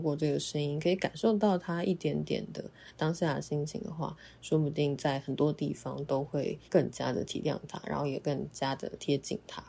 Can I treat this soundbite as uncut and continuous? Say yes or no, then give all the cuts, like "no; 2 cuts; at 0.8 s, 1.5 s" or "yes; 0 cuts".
no; 1 cut; at 6.6 s